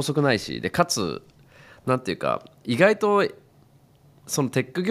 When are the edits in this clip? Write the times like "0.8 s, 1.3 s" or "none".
none